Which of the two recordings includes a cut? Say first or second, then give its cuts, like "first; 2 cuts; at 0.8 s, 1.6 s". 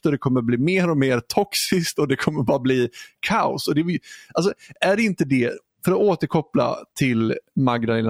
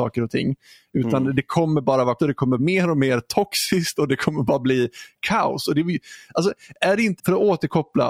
second; 3 cuts; at 2.2 s, 2.6 s, 7.2 s